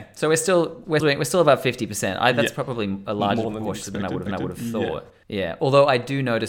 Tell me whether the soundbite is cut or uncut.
cut